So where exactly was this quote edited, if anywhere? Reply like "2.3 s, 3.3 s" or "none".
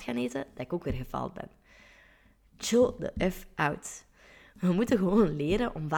none